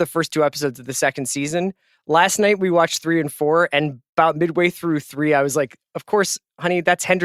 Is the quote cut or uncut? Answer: uncut